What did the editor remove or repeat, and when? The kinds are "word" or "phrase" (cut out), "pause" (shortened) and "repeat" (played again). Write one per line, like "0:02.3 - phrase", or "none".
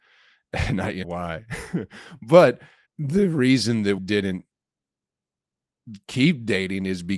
0:01.0 - word
0:02.9 - pause
0:04.0 - word

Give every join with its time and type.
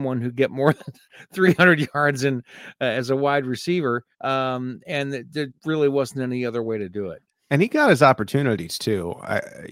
0:04.1 - pause
0:05.5 - word

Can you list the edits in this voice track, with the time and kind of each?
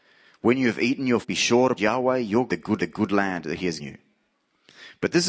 0:01.2 - word
0:01.8 - word
0:02.5 - phrase
0:02.8 - repeat
0:03.8 - word

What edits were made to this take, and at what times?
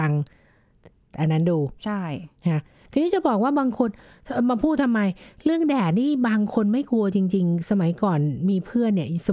none

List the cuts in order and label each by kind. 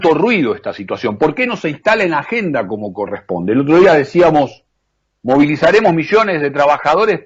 0:05.0 - pause

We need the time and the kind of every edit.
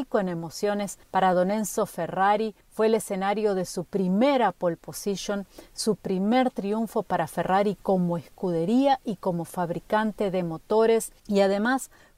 0:01.0 - pause
0:02.6 - pause
0:11.2 - pause

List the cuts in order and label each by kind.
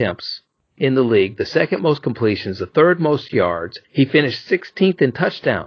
0:03.8 - pause

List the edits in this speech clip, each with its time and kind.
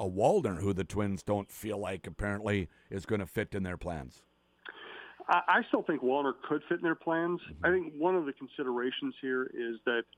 none

